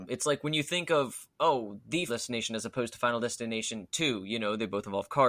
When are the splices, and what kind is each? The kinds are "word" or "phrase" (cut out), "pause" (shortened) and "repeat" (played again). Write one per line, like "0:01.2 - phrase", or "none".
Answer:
0:02.1 - word